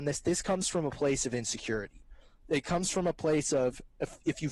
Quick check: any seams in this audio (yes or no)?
no